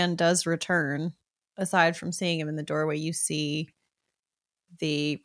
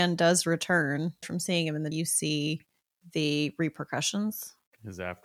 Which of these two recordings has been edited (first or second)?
second